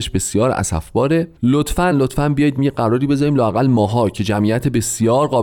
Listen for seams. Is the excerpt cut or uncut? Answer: cut